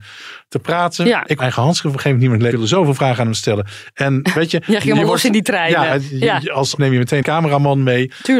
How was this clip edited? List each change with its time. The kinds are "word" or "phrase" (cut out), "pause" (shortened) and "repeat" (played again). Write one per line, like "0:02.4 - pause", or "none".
0:01.4 - word
0:02.5 - phrase
0:06.8 - phrase
0:07.2 - word